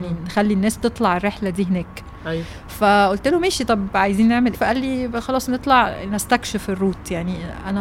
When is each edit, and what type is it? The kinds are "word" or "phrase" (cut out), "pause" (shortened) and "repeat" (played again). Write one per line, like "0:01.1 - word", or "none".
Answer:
0:04.5 - word